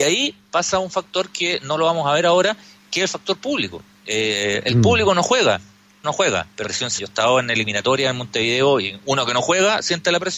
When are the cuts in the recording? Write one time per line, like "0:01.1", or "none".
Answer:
0:06.0
0:06.6
0:07.0